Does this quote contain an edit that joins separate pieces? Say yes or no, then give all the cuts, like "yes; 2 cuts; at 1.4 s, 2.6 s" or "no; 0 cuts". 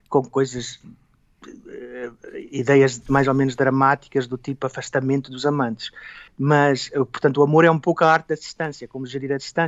yes; 1 cut; at 6.3 s